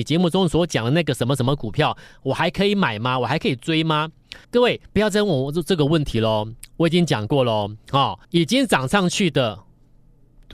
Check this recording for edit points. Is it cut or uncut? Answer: cut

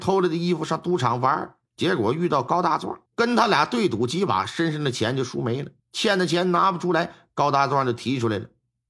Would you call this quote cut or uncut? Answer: cut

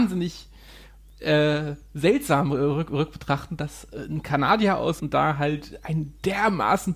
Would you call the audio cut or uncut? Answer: cut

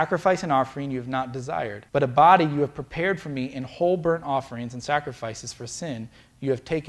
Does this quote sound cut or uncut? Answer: cut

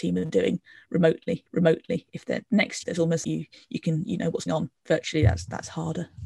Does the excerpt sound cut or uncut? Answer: cut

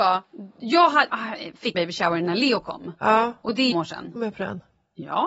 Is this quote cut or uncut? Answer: cut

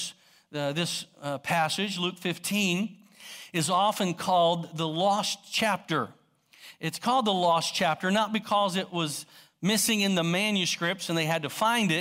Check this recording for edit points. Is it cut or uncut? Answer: uncut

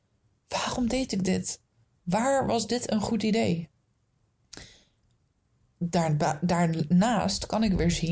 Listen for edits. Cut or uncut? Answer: uncut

